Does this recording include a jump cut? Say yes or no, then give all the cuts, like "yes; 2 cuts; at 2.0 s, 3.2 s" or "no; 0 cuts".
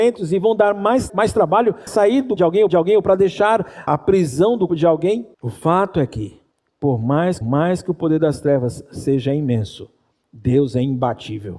yes; 9 cuts; at 1.1 s, 1.9 s, 2.4 s, 2.7 s, 3.9 s, 4.7 s, 5.3 s, 6.5 s, 7.4 s